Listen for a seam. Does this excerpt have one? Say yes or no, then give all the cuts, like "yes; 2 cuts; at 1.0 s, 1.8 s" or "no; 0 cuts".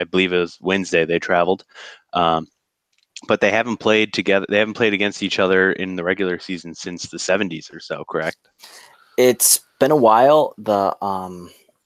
no; 0 cuts